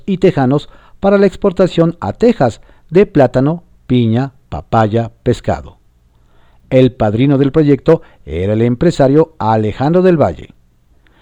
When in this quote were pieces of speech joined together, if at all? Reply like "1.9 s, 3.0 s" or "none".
none